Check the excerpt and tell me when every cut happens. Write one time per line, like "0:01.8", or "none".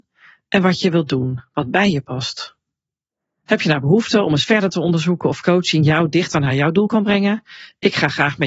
none